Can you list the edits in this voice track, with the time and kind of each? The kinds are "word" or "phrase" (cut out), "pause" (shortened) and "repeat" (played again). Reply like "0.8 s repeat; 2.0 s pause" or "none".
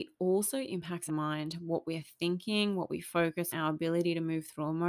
1.1 s phrase; 3.5 s word